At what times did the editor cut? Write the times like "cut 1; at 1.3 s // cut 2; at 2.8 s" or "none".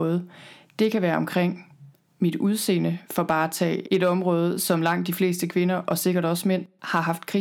cut 1; at 3.8 s